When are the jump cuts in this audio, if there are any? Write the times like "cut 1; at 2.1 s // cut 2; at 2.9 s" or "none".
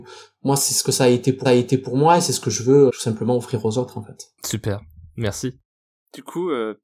cut 1; at 1.4 s // cut 2; at 2.9 s